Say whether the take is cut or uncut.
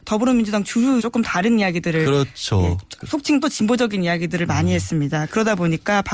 cut